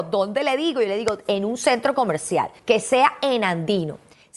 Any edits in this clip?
no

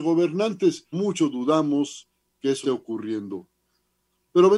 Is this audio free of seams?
no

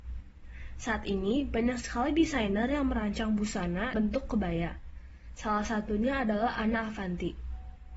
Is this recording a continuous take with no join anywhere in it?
no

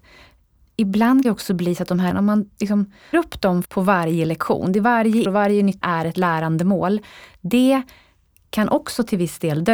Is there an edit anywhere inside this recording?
yes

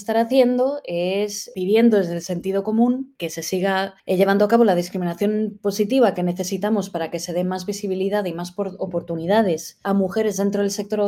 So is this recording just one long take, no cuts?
yes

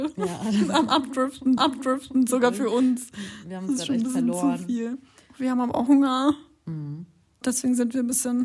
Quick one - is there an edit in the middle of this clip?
yes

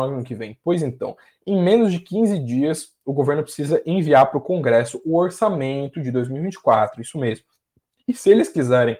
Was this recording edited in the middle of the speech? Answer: no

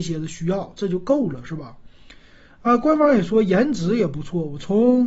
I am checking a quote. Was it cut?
no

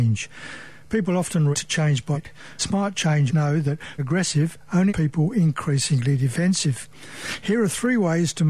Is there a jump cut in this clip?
yes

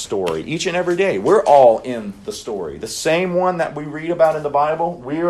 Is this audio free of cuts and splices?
yes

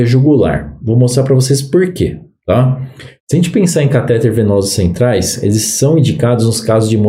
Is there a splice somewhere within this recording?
no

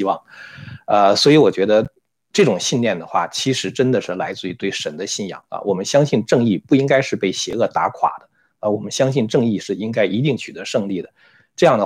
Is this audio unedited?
yes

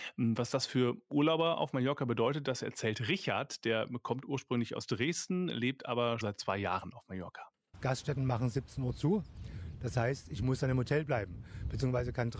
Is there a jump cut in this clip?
yes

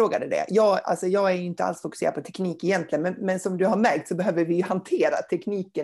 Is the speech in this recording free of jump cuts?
yes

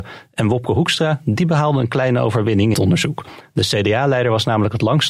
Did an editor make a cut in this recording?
yes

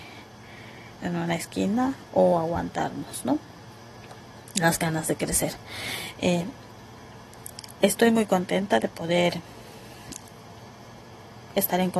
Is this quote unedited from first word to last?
no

